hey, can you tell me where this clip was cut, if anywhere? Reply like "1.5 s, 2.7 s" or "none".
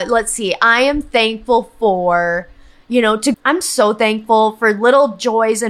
3.3 s